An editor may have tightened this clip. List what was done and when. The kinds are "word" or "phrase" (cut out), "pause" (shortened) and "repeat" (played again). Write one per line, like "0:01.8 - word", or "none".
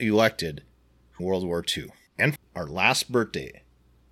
0:01.2 - phrase
0:02.4 - word